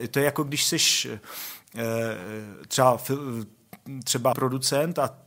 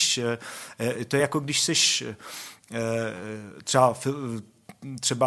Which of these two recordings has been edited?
first; 1 cut; at 4.3 s

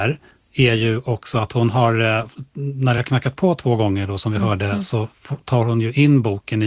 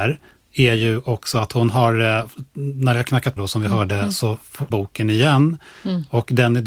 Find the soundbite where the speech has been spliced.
second; 2 cuts; at 3.4 s, 4.7 s

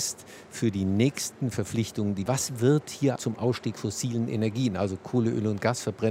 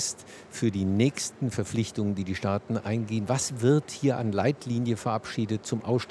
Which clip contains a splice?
first; 3 cuts; at 2.3 s, 3.2 s, 3.8 s

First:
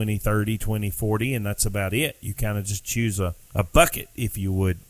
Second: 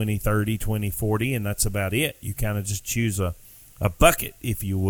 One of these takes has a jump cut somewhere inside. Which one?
first; 1 cut; at 3.4 s

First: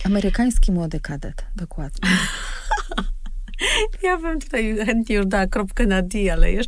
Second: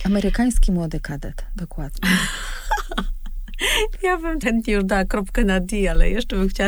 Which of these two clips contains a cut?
second; 1 cut; at 4.4 s

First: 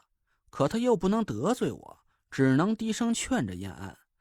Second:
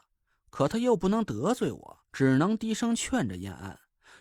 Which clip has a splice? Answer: second; 1 cut; at 2.0 s

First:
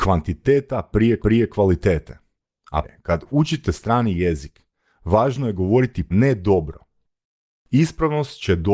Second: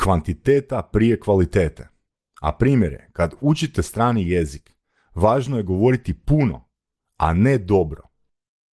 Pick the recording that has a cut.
first; 3 cuts; at 1.2 s, 2.8 s, 6.1 s

